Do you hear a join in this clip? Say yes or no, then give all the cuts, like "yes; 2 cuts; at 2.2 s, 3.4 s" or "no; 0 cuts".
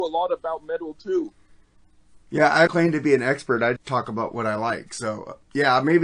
yes; 2 cuts; at 2.7 s, 3.8 s